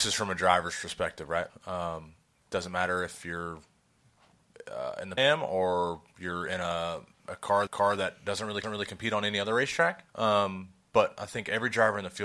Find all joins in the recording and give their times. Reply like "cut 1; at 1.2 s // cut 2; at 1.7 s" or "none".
cut 1; at 1.5 s // cut 2; at 5.2 s // cut 3; at 7.2 s // cut 4; at 7.7 s // cut 5; at 8.6 s // cut 6; at 10.1 s

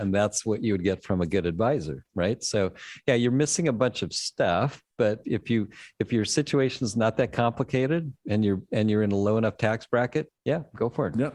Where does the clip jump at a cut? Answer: cut 1; at 5.2 s // cut 2; at 10.4 s

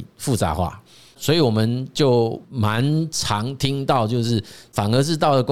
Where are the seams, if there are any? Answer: cut 1; at 2.4 s

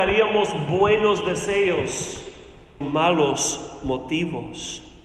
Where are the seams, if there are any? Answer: cut 1; at 2.8 s

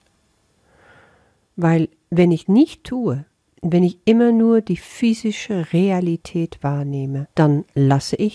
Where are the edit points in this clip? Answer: cut 1; at 2.4 s // cut 2; at 7.3 s

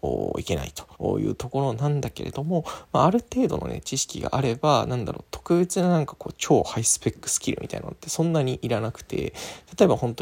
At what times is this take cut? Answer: cut 1; at 0.9 s

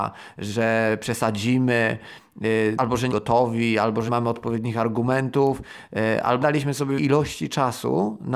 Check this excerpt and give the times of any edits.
cut 1; at 2.8 s // cut 2; at 3.1 s // cut 3; at 4.1 s // cut 4; at 6.4 s // cut 5; at 7.0 s

